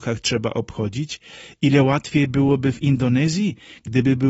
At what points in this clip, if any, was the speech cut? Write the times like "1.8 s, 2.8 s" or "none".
none